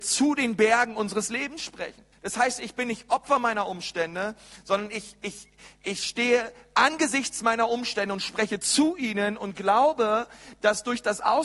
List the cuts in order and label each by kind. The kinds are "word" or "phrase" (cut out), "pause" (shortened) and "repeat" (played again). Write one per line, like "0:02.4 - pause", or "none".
0:02.1 - pause